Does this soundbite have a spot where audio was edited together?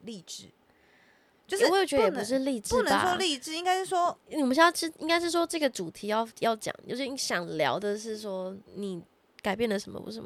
yes; 1 cut; at 8.7 s

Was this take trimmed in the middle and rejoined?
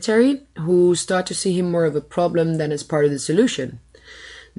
no; 0 cuts

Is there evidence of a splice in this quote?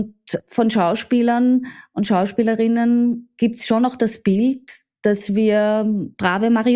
no; 0 cuts

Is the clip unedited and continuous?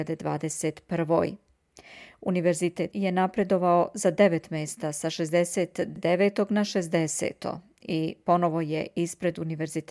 no; 1 cut; at 2.9 s

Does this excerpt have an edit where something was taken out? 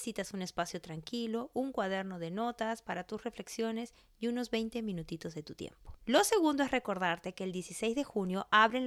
no; 0 cuts

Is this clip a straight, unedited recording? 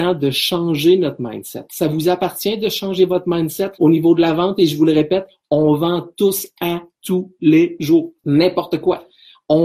no; 2 cuts; at 3.7 s, 8.2 s

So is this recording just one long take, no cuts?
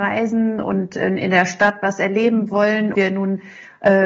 no; 1 cut; at 2.9 s

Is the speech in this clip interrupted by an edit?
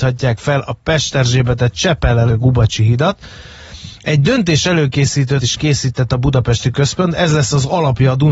yes; 3 cuts; at 2.3 s, 5.4 s, 6.7 s

